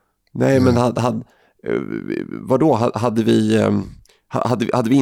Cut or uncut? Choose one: uncut